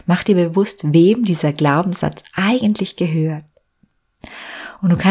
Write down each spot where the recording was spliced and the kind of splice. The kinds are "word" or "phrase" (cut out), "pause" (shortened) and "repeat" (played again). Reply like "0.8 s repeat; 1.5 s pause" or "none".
none